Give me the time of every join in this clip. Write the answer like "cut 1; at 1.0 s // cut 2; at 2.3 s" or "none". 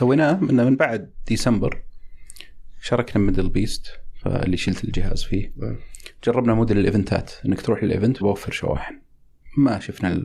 cut 1; at 8.2 s